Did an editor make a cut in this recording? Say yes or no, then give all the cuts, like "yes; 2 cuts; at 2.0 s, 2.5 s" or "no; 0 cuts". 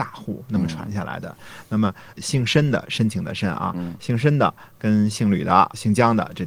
no; 0 cuts